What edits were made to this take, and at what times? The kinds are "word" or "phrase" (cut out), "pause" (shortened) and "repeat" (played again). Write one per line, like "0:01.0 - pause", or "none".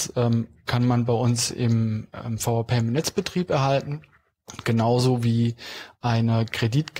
none